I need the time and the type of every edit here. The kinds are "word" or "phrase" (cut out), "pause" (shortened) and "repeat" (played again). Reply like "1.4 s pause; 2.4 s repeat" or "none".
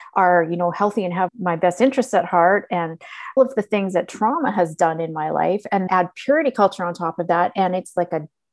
1.3 s word; 3.4 s word; 5.9 s word